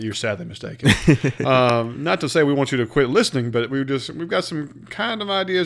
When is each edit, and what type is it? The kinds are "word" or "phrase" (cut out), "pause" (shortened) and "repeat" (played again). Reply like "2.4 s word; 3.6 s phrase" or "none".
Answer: none